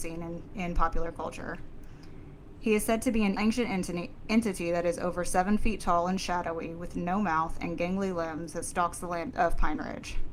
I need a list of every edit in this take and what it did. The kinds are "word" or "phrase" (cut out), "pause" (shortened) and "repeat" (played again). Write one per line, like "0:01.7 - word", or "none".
0:03.4 - word
0:09.3 - word